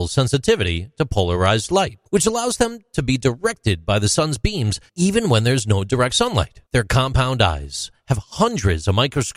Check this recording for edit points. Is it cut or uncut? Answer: cut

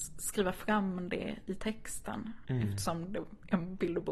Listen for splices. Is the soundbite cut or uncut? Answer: uncut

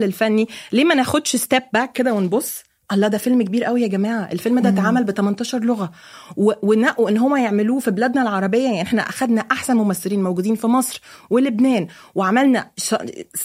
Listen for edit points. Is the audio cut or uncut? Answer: uncut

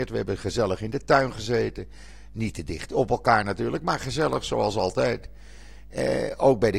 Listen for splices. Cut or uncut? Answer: uncut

